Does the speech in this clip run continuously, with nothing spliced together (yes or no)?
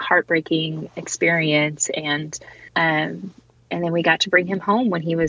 no